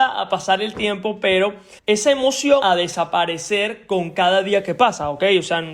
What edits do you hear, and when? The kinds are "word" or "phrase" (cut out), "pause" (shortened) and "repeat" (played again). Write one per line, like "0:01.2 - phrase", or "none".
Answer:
0:01.8 - pause
0:02.6 - word

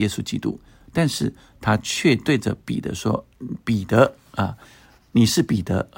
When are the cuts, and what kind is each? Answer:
none

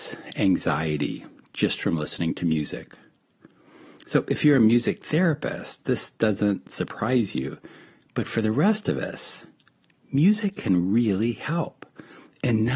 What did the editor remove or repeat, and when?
none

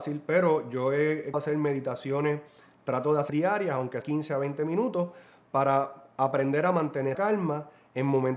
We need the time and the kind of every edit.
0:01.3 - word
0:03.3 - word
0:04.0 - word
0:07.1 - word

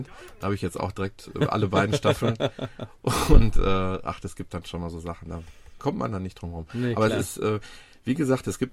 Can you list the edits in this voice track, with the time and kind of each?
none

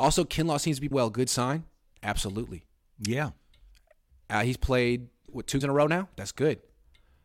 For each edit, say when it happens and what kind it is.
0:00.9 - word
0:05.3 - word
0:05.6 - word

